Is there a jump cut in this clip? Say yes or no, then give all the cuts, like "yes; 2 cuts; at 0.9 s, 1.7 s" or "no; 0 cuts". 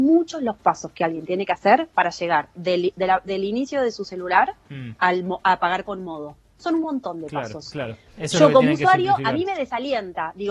no; 0 cuts